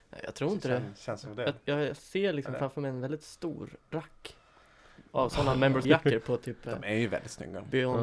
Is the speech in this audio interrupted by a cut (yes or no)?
yes